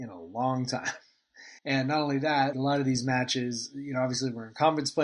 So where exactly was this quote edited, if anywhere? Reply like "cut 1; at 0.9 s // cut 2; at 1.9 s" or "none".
cut 1; at 1.6 s // cut 2; at 2.5 s